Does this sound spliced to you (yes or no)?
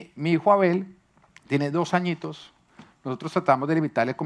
no